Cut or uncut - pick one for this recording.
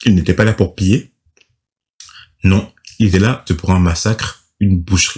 cut